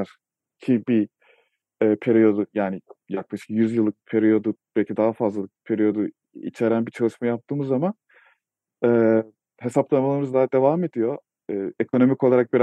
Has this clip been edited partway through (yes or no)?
no